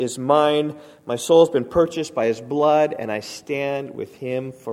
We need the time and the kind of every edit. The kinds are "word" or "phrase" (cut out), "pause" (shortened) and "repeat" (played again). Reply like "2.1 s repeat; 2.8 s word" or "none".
none